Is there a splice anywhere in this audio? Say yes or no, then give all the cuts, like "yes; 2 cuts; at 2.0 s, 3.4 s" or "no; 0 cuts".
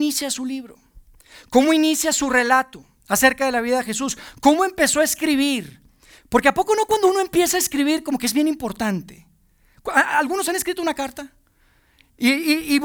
no; 0 cuts